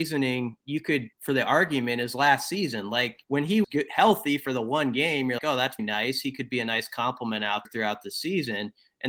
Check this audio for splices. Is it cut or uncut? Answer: cut